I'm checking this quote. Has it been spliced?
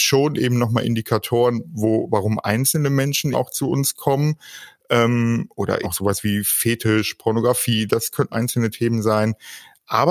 yes; 3 cuts; at 3.3 s, 5.8 s, 8.3 s

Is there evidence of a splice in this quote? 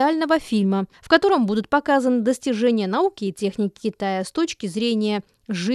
yes; 1 cut; at 0.9 s

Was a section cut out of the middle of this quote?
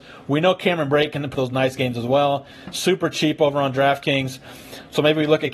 yes; 1 cut; at 1.3 s

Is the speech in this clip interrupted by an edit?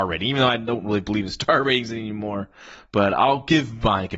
no; 0 cuts

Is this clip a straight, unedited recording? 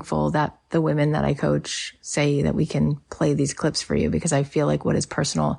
yes; 0 cuts

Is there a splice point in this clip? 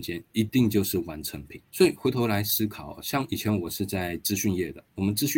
yes; 1 cut; at 1.6 s

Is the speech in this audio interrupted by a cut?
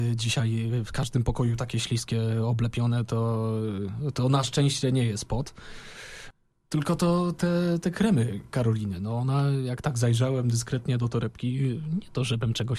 no; 0 cuts

